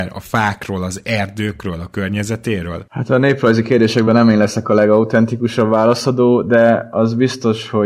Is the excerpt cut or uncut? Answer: uncut